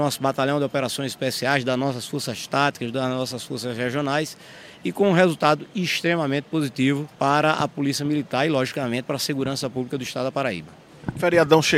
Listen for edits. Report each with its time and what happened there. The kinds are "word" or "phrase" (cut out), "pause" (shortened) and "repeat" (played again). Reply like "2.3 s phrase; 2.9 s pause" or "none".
7.1 s pause